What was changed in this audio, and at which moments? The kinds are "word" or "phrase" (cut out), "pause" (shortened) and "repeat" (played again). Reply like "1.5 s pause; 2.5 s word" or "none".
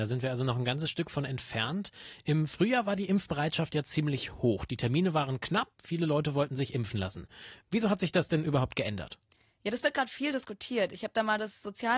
5.7 s word